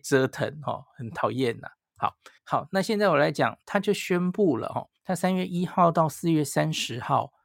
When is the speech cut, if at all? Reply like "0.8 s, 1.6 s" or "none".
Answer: 2.4 s, 3.6 s, 5.0 s